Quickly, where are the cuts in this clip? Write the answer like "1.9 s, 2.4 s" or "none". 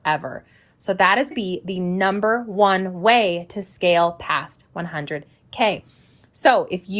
1.3 s